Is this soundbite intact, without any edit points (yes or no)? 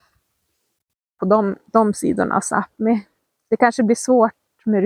yes